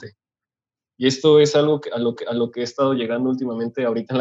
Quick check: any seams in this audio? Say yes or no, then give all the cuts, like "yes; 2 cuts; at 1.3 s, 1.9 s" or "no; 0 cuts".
yes; 1 cut; at 2.2 s